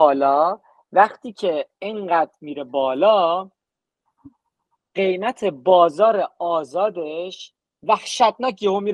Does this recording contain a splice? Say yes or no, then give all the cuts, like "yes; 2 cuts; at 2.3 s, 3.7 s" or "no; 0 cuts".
no; 0 cuts